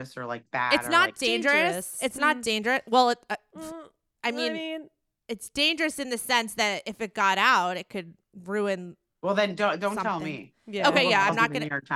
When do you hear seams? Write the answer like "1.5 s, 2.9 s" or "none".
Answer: none